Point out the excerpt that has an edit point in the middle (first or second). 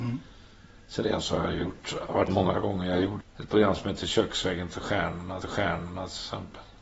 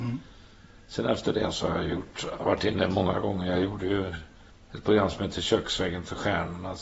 first